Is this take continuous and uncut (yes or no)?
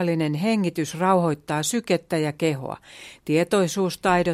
yes